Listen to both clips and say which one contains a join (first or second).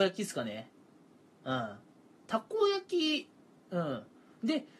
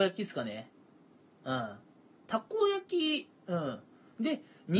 second